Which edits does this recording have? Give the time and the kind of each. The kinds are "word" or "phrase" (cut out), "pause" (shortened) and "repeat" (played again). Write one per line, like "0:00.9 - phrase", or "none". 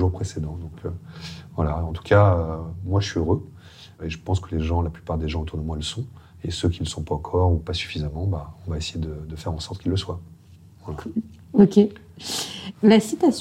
none